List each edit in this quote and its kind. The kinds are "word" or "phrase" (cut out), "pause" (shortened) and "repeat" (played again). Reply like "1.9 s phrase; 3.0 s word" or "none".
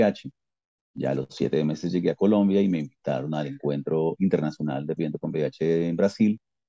4.2 s word; 5.0 s word